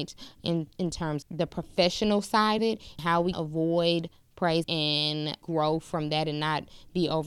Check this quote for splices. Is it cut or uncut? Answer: cut